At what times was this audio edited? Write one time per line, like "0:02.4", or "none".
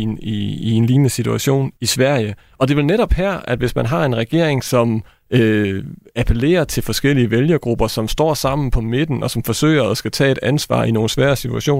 0:01.8